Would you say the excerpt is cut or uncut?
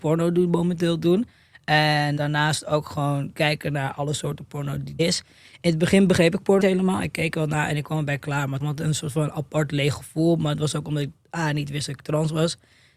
cut